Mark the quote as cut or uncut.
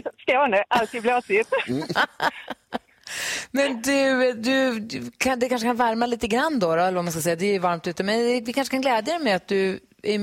uncut